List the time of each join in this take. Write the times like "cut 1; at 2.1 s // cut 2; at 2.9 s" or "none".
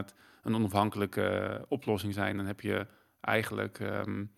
none